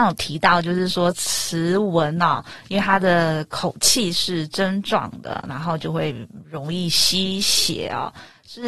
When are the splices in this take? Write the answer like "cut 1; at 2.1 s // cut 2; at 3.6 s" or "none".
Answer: none

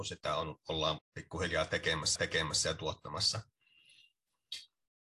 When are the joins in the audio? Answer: cut 1; at 1.0 s // cut 2; at 2.2 s

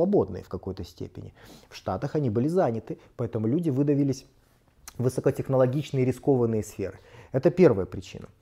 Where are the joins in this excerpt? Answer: none

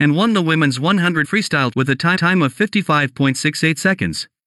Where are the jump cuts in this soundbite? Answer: cut 1; at 1.2 s // cut 2; at 1.7 s // cut 3; at 2.2 s

